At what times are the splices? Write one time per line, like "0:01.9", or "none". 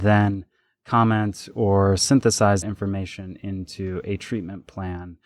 0:02.6